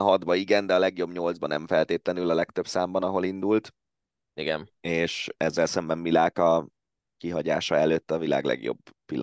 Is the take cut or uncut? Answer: uncut